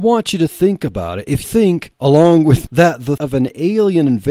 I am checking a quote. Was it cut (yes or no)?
yes